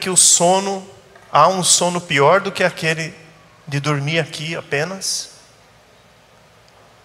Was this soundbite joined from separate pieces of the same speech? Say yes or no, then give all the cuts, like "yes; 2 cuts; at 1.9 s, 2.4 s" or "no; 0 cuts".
no; 0 cuts